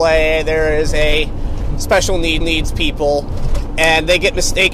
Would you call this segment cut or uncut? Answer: cut